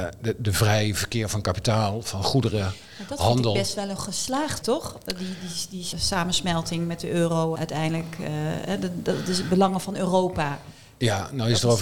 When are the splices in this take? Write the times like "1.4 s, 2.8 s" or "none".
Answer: 4.6 s, 5.9 s, 7.6 s